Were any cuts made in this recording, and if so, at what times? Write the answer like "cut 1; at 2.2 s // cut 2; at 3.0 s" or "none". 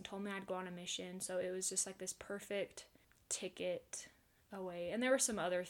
cut 1; at 3.0 s